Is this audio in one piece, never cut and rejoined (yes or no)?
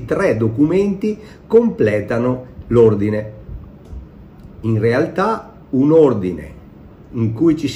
yes